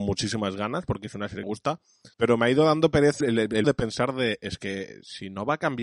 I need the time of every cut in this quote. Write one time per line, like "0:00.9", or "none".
0:01.4
0:02.1
0:03.2
0:03.6

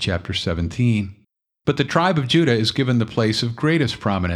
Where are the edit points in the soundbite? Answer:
0:01.2

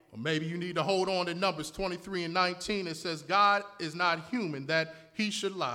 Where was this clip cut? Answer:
none

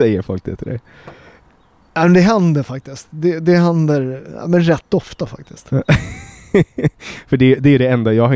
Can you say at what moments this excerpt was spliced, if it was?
none

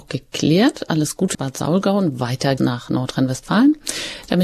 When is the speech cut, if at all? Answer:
0:01.3
0:02.6

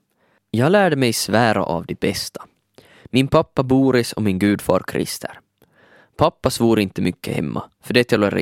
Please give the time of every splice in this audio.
none

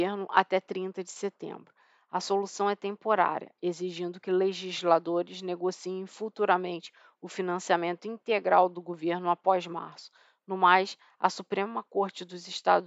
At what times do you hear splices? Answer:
none

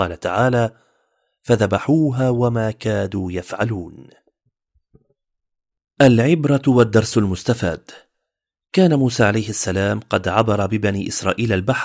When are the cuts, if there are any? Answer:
none

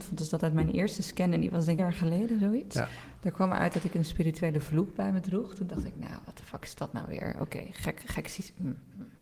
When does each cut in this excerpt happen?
0:01.8

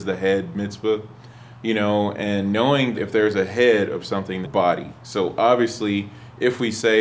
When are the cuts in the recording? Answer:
0:02.9
0:04.4

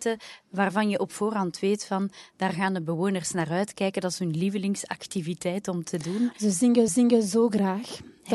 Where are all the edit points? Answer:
0:06.9

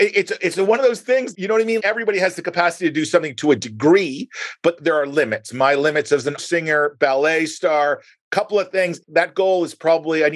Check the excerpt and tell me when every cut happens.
0:01.3
0:01.8
0:06.4

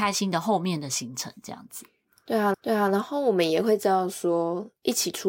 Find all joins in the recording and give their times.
0:02.5

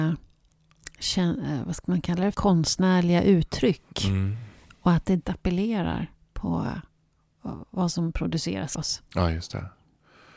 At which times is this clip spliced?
0:02.3
0:05.2
0:08.7

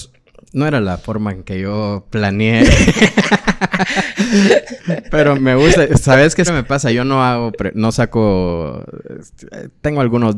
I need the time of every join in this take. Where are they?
0:05.3
0:06.5

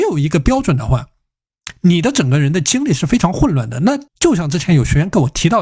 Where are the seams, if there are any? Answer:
0:04.1

